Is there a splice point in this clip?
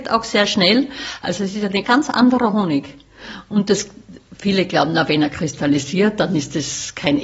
yes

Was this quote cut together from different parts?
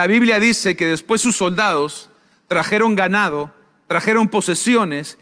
no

